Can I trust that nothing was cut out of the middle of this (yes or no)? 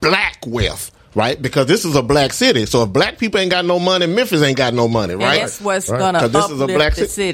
yes